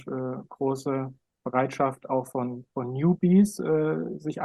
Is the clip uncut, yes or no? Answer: yes